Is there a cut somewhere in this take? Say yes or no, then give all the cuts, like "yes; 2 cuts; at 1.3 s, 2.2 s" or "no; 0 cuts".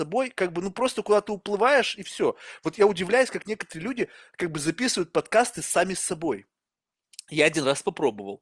no; 0 cuts